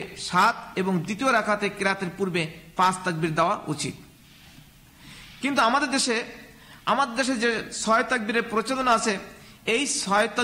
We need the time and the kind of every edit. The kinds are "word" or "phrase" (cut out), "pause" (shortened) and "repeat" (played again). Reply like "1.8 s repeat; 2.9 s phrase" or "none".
none